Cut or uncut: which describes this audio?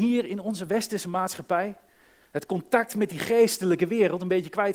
uncut